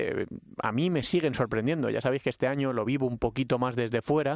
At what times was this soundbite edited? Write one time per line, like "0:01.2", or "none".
none

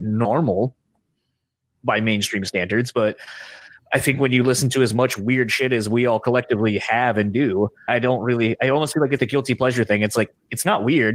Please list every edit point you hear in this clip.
0:07.9
0:09.2

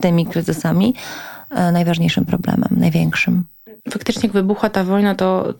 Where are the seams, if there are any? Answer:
0:03.8

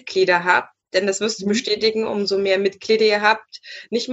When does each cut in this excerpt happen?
none

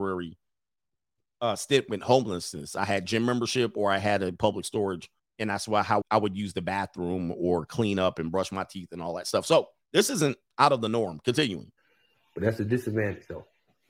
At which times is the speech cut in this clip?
0:05.2
0:06.0

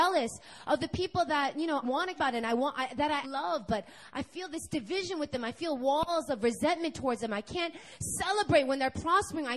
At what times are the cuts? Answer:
0:01.8
0:02.2
0:03.2

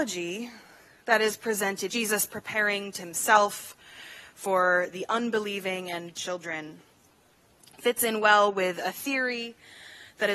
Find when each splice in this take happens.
0:01.9
0:03.0
0:06.1

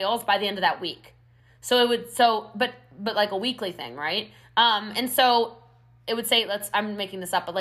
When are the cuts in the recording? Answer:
none

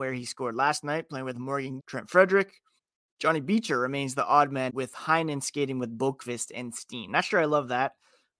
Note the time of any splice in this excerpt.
0:01.8
0:02.8
0:04.7

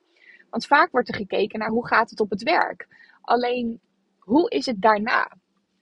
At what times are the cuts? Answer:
none

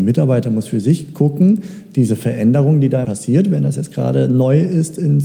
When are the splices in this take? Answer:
0:03.0

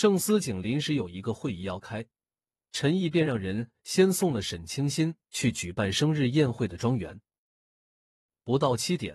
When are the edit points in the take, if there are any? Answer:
none

